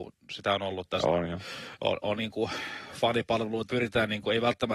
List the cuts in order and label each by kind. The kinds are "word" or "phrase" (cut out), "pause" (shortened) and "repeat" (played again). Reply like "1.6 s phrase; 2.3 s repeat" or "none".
2.2 s word; 3.7 s word